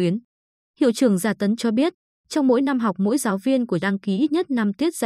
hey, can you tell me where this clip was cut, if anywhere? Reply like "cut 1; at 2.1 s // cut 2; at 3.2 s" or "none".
cut 1; at 1.6 s // cut 2; at 3.8 s

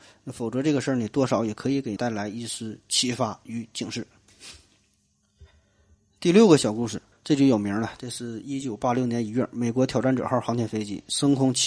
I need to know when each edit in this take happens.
cut 1; at 2.0 s // cut 2; at 7.1 s

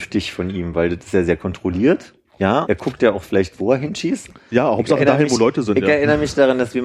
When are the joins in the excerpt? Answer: cut 1; at 2.7 s

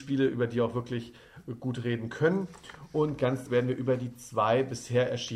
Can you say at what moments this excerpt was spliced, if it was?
cut 1; at 3.5 s

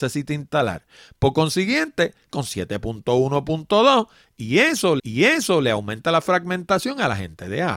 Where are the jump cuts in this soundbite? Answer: cut 1; at 2.3 s // cut 2; at 5.0 s

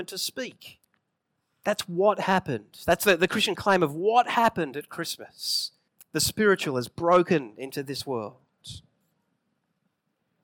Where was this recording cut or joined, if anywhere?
cut 1; at 1.4 s // cut 2; at 5.9 s

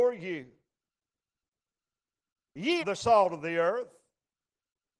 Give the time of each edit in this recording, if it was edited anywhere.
cut 1; at 2.8 s

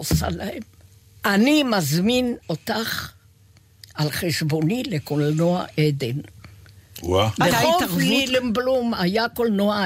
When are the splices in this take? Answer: cut 1; at 2.4 s // cut 2; at 7.5 s

